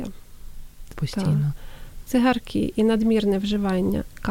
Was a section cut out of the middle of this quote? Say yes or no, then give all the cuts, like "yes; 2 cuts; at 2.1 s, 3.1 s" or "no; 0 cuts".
yes; 1 cut; at 0.9 s